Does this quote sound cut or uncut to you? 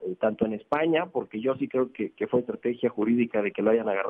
uncut